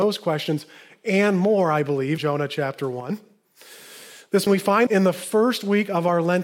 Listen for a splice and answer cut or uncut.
cut